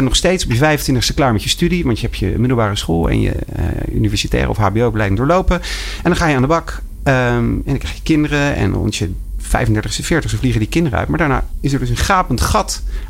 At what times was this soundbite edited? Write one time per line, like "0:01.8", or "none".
none